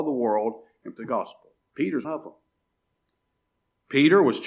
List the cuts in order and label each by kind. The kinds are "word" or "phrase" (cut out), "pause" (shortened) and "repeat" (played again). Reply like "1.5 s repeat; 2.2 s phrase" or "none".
1.0 s word; 2.0 s word